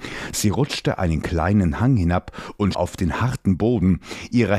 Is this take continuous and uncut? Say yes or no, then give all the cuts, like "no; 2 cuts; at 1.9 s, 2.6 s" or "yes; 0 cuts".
no; 1 cut; at 2.7 s